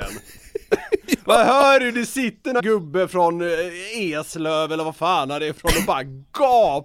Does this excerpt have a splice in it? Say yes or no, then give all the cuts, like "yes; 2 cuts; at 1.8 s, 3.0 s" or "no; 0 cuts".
yes; 1 cut; at 2.6 s